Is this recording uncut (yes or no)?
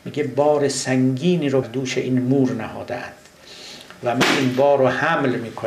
no